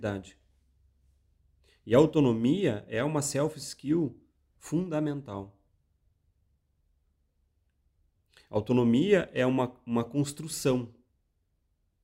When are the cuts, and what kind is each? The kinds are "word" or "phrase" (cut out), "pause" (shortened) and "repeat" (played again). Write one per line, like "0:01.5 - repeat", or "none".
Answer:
none